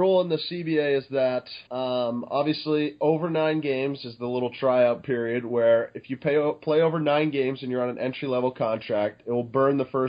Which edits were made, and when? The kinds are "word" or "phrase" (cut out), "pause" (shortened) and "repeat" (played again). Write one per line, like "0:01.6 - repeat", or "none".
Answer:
0:01.7 - pause